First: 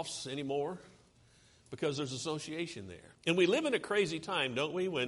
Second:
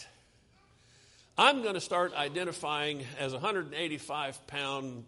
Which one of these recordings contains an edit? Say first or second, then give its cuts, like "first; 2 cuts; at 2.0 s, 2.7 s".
first; 1 cut; at 3.1 s